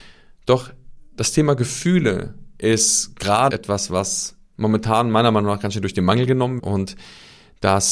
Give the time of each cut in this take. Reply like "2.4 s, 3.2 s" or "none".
3.5 s, 6.6 s